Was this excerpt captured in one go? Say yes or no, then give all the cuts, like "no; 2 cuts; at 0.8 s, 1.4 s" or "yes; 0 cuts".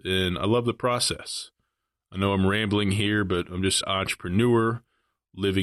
no; 1 cut; at 3.8 s